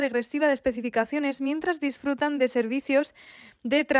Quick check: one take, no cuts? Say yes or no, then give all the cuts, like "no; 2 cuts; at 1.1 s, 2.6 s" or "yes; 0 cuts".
yes; 0 cuts